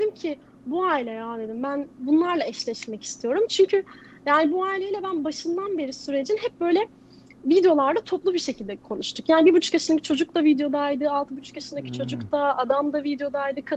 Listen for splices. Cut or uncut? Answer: uncut